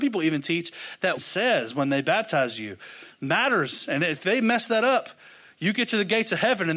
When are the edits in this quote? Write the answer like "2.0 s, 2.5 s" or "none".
1.2 s